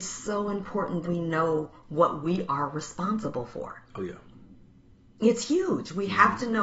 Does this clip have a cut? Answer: yes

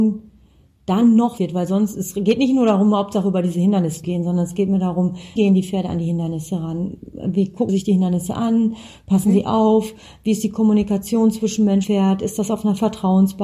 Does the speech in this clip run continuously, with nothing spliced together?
no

